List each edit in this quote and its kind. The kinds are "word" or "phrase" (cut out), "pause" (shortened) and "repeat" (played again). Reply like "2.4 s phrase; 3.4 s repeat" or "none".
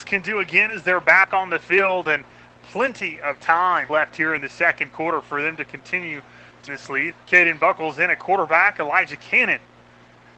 3.9 s word; 6.7 s word; 7.1 s word